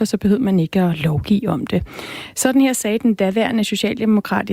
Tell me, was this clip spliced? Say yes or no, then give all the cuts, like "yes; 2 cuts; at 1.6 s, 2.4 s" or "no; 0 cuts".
no; 0 cuts